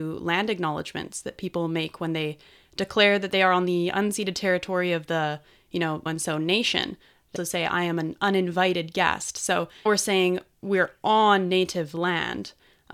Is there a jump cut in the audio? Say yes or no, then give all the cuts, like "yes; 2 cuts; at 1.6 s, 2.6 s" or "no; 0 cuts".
yes; 3 cuts; at 6.1 s, 7.4 s, 9.9 s